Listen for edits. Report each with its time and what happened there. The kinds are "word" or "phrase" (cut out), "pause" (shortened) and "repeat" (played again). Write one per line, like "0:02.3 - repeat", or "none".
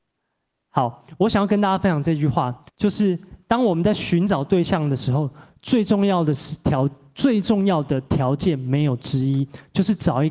0:02.7 - pause